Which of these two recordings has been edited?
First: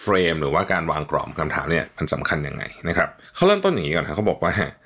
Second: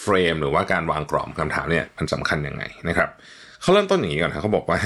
first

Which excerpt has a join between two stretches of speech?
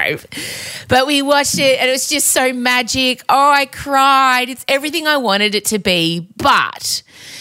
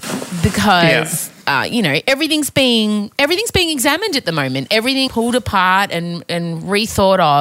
second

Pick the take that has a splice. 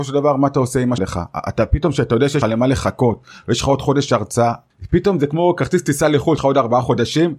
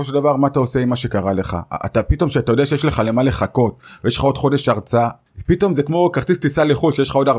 first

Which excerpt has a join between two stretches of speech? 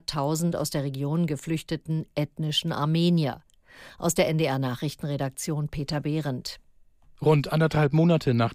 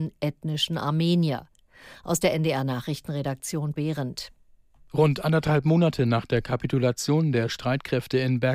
second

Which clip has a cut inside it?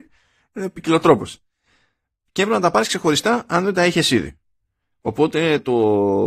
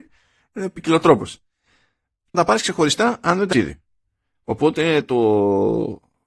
second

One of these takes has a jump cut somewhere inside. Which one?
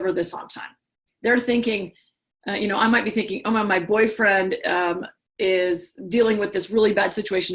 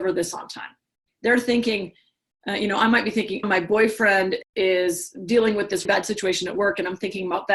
second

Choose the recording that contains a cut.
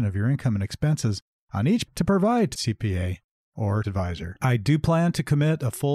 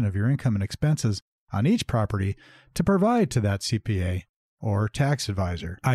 first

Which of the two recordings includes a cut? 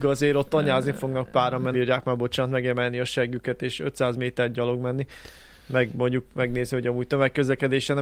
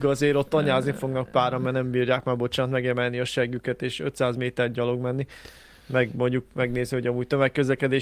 first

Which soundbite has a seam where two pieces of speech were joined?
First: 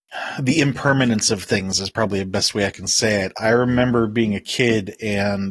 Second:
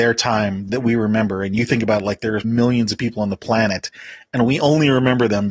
second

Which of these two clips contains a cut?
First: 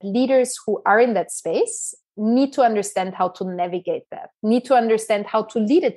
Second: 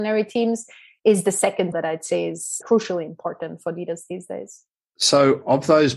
second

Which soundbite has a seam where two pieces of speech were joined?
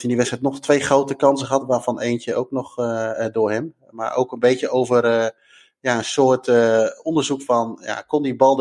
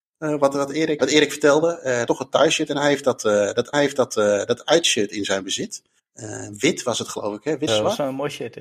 second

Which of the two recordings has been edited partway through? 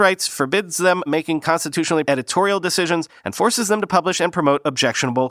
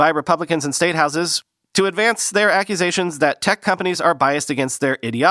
first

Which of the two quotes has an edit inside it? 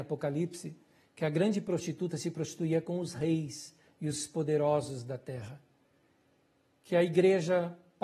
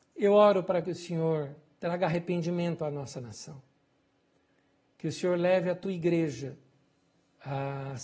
second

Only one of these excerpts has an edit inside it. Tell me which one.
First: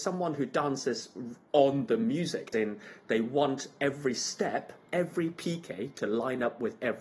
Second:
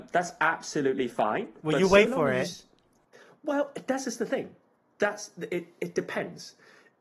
first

